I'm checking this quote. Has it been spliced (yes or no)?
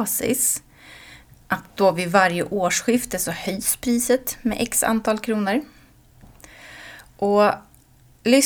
no